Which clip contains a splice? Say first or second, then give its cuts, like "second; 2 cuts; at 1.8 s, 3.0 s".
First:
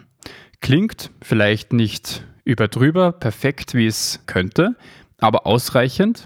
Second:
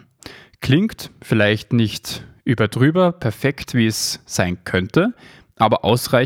first; 1 cut; at 4.2 s